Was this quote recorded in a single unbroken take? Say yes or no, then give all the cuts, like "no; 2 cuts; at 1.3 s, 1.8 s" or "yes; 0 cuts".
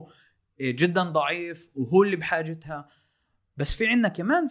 yes; 0 cuts